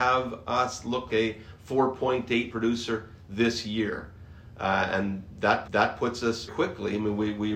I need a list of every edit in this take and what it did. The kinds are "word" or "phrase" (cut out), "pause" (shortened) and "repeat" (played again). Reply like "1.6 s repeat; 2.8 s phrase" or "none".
1.1 s word; 2.5 s phrase; 5.7 s repeat; 6.5 s word